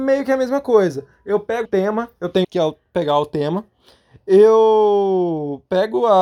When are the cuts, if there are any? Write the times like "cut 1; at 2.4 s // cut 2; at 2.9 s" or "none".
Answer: cut 1; at 1.6 s // cut 2; at 2.4 s